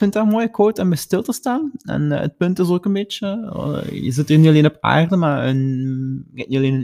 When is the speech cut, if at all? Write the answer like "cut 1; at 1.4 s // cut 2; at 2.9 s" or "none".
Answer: none